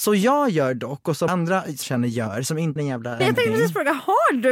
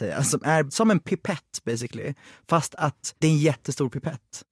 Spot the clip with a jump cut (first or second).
first